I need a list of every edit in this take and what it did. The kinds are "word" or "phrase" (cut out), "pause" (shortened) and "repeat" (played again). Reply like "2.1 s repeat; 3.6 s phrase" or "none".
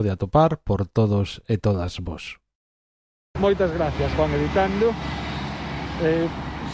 none